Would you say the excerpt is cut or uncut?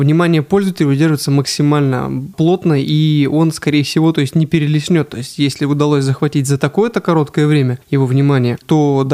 uncut